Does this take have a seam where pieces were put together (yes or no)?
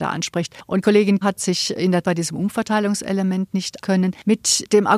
yes